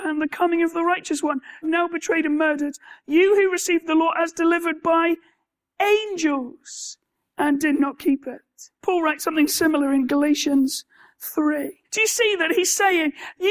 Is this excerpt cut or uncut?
cut